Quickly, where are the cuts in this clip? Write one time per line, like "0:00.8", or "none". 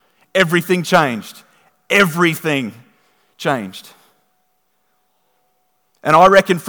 none